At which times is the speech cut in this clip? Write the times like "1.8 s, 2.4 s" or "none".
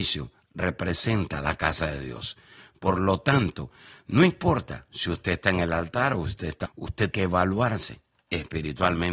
6.7 s, 7.1 s

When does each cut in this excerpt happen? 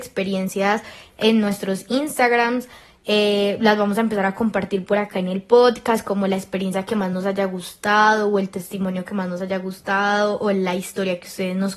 none

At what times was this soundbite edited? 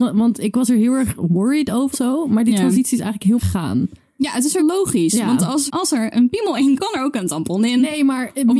1.9 s, 3.4 s, 4.6 s, 5.7 s, 6.8 s

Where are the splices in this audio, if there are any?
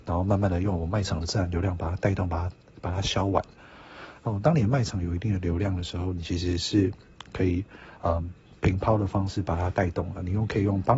none

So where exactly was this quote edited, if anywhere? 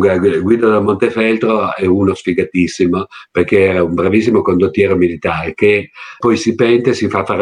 6.2 s

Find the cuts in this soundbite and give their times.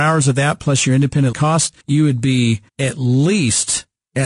1.3 s, 1.8 s, 2.7 s

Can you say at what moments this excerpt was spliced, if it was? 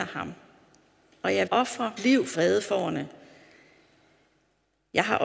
1.5 s, 2.0 s, 2.3 s

